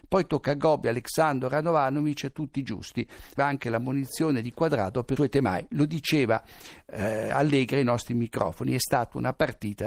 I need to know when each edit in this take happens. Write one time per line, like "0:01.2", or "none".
0:03.4
0:05.2